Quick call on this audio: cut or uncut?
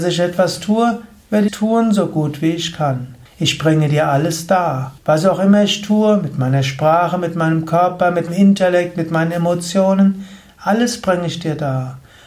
cut